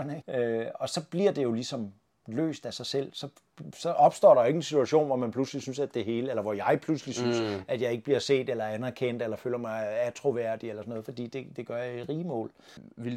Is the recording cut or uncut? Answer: uncut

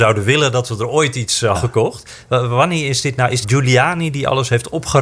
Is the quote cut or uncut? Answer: cut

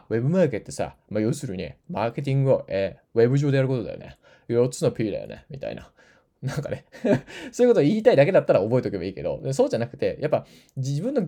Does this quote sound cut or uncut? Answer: uncut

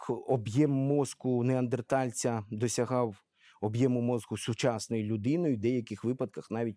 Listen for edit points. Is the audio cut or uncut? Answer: uncut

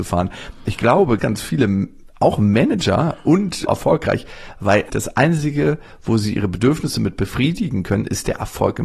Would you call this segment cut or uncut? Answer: cut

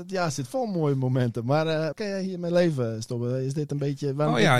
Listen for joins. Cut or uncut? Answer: cut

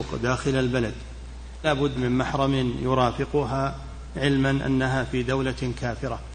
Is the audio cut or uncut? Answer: cut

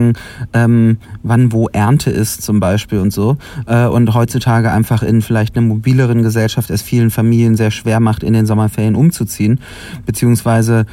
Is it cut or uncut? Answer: uncut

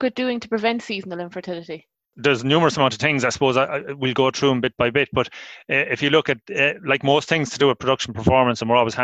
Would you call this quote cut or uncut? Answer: uncut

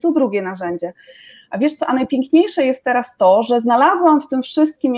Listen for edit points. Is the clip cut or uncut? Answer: uncut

